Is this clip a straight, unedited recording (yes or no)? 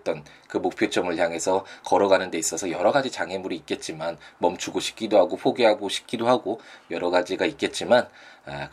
yes